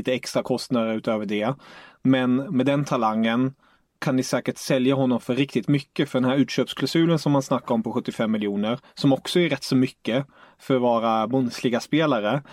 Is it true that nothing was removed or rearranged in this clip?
yes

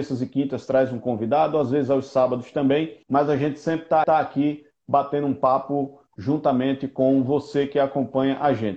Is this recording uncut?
no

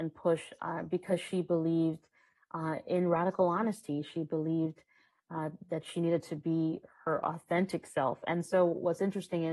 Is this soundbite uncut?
yes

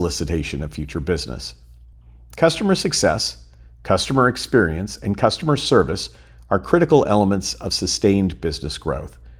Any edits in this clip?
no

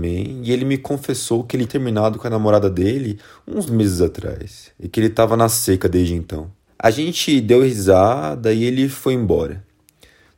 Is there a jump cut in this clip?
yes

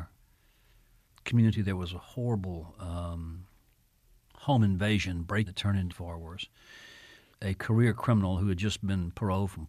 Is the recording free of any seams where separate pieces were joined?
no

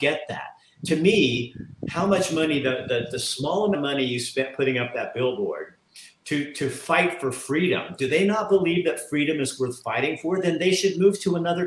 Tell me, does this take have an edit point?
yes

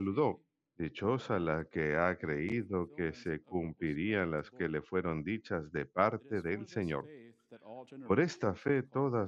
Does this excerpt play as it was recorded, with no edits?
no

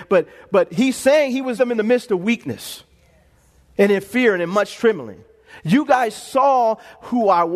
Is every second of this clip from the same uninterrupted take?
no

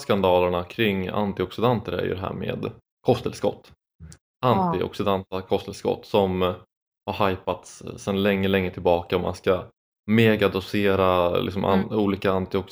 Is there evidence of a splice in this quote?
no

